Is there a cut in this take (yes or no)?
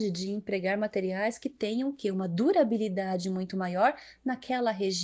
no